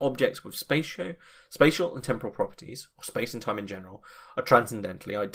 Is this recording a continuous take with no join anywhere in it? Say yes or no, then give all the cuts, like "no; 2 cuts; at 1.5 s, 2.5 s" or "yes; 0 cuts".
yes; 0 cuts